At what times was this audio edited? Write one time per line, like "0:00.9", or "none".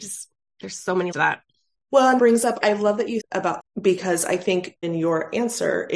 0:01.1
0:02.2
0:02.6
0:03.2
0:03.6
0:04.8